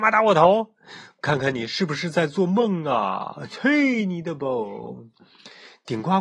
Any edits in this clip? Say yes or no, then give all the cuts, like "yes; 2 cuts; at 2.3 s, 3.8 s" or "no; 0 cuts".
no; 0 cuts